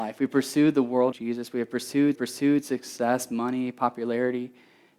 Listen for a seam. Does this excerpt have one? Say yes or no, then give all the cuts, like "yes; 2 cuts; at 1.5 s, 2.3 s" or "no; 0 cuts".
yes; 2 cuts; at 1.1 s, 2.1 s